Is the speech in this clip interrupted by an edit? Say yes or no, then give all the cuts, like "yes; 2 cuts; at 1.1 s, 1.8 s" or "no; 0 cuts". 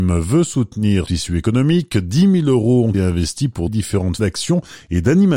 yes; 4 cuts; at 1.1 s, 2.9 s, 3.7 s, 4.2 s